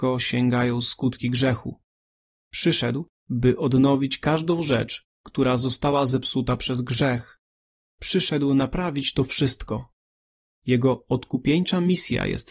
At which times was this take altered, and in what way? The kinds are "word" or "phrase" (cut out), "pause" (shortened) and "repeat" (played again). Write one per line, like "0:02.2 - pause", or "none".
none